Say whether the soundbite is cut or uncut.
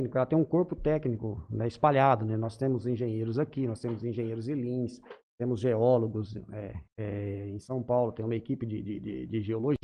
cut